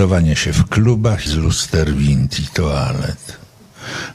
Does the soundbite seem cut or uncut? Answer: cut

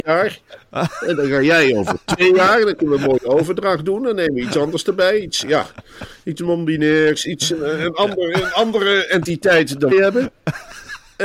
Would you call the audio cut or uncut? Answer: cut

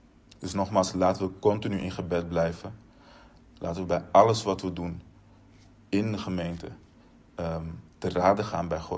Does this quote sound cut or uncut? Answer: uncut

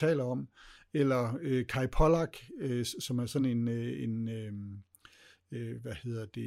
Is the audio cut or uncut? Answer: uncut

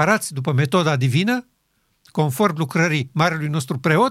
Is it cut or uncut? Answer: uncut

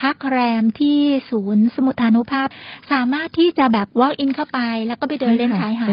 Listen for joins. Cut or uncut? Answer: cut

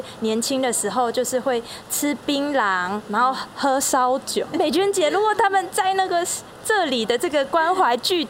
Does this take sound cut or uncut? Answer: cut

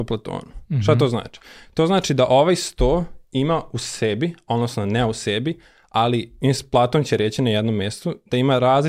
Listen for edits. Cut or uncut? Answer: uncut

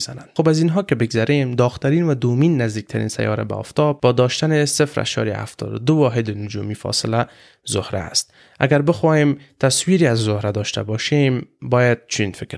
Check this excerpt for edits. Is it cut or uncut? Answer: uncut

